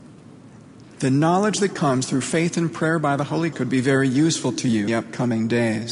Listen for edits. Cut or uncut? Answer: cut